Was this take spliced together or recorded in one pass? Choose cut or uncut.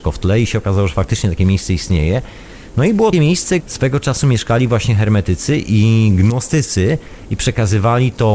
cut